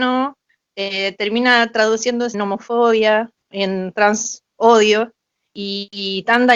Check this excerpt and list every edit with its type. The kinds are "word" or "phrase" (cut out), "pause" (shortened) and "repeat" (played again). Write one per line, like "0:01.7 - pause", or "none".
0:02.3 - word
0:03.5 - word
0:04.5 - pause